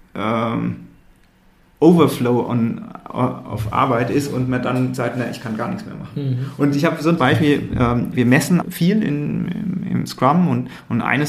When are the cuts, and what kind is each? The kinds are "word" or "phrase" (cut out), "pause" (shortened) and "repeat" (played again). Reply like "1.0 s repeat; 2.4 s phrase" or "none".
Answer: 7.2 s word; 8.1 s word; 8.6 s word; 10.1 s word